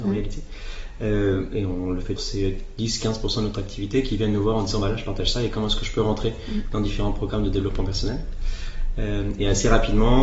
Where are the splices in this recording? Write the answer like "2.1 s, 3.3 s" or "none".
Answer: 2.2 s